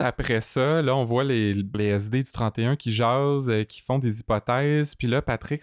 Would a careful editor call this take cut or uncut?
cut